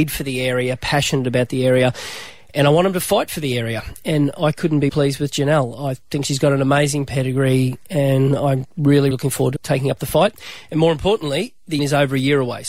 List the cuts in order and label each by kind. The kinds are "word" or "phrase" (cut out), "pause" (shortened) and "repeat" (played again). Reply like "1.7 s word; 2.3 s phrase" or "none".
4.9 s word; 9.1 s word; 9.6 s word; 11.8 s word